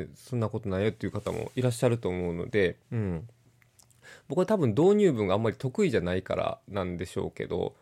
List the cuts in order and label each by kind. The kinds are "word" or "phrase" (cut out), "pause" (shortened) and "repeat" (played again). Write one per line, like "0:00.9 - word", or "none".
0:02.8 - pause